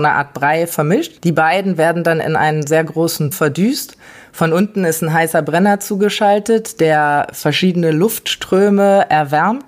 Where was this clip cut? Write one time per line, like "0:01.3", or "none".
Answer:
0:01.2
0:03.3